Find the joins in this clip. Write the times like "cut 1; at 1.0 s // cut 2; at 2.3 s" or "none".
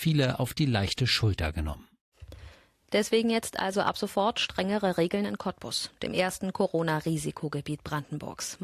none

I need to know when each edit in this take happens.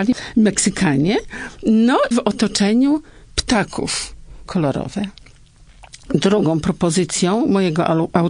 cut 1; at 2.1 s // cut 2; at 4.5 s

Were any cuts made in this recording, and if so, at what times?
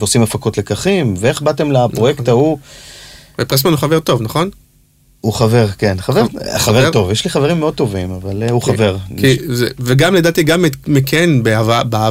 none

